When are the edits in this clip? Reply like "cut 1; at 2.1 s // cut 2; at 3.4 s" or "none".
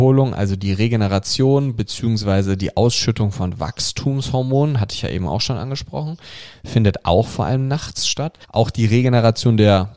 cut 1; at 8.4 s